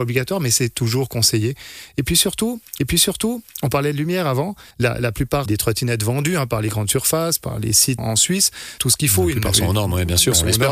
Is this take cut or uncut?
cut